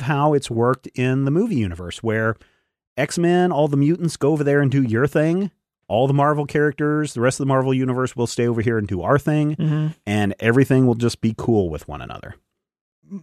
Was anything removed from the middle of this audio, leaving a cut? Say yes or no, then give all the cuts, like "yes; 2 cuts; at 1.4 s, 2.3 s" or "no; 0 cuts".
no; 0 cuts